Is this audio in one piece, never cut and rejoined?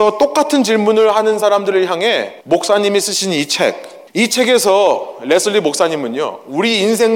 no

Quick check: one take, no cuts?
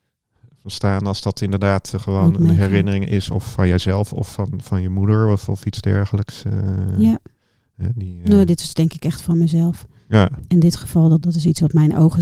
no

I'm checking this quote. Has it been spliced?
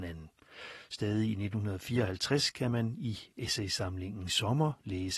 no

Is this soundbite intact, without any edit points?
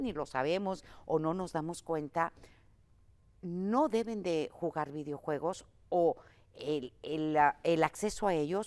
yes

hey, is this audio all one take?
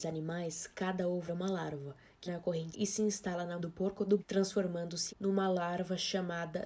no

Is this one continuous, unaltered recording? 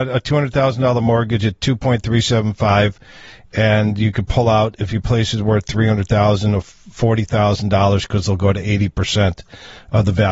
yes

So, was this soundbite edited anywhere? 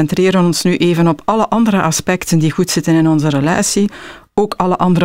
no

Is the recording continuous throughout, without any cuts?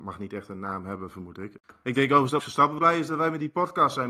no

